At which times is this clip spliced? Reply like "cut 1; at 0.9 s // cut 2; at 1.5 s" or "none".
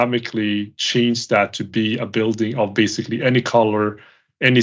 none